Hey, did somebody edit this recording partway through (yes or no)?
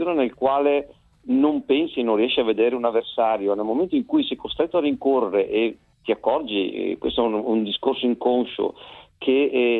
no